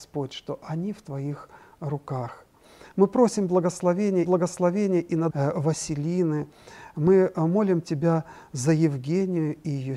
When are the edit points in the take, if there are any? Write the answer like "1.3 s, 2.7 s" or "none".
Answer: 4.3 s, 5.3 s